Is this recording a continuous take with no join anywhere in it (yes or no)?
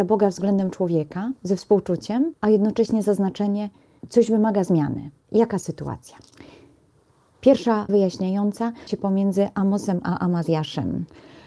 no